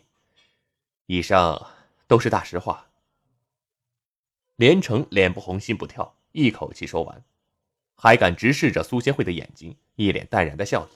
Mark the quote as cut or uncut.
uncut